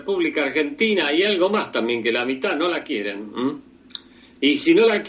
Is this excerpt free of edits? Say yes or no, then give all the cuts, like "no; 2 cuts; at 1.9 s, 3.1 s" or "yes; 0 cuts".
yes; 0 cuts